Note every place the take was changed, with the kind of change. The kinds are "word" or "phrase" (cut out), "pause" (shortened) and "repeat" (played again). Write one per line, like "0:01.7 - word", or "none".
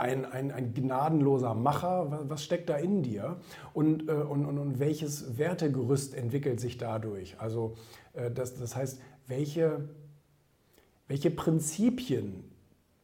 none